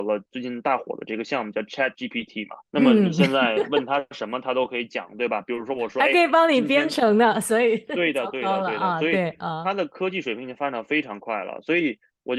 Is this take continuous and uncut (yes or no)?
no